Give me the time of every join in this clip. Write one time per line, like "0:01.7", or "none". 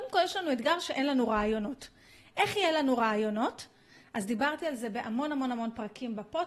none